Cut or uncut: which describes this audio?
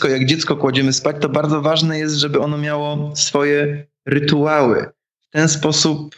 uncut